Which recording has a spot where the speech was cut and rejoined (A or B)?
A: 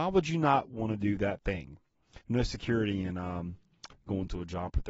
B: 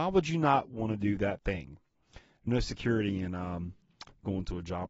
A